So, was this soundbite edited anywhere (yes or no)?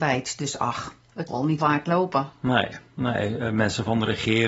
yes